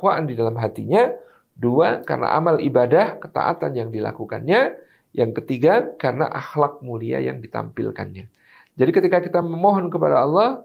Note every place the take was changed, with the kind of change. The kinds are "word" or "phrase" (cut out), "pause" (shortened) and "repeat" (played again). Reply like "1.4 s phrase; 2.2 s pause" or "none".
none